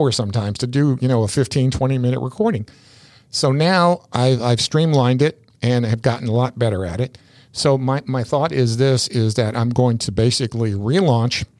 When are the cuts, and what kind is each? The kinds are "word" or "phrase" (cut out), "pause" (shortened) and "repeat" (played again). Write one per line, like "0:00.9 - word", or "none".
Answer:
none